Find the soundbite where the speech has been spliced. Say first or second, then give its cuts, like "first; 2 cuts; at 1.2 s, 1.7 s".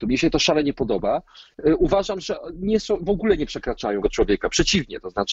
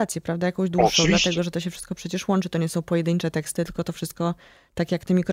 first; 1 cut; at 4.0 s